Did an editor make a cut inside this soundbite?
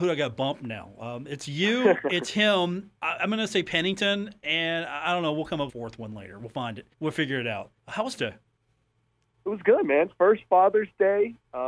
yes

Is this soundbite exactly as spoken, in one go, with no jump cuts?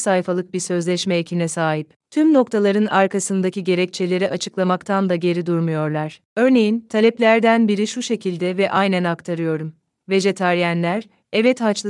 yes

